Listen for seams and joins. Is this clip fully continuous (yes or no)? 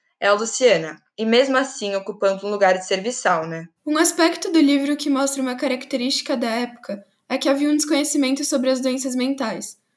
no